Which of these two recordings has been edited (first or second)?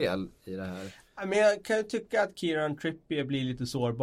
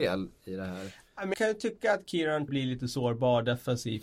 second